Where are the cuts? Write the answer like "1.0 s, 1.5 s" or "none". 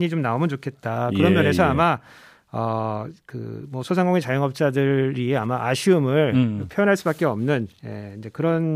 none